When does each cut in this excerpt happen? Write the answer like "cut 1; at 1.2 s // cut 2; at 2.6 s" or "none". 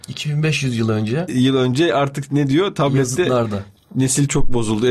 none